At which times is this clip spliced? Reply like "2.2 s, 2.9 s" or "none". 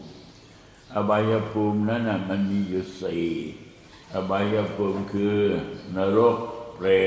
4.0 s